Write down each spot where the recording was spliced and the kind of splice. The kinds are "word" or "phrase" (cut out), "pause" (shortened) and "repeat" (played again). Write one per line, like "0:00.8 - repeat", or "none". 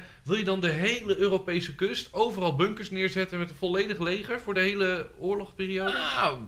none

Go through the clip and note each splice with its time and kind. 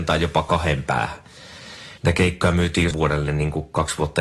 0:02.0 - pause
0:02.9 - word

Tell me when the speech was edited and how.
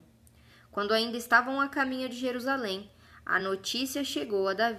none

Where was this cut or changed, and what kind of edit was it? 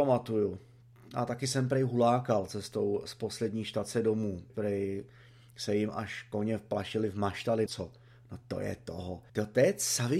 0:04.5 - word
0:07.7 - word
0:09.3 - pause

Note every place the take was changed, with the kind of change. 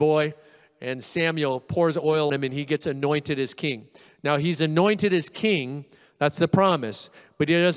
0:02.3 - word

